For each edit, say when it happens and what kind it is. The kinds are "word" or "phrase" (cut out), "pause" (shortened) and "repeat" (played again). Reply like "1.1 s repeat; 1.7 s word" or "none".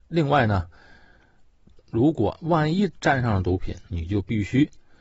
3.9 s pause